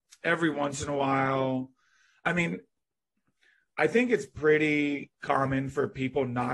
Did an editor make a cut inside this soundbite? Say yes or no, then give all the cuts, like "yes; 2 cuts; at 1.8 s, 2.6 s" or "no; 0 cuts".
no; 0 cuts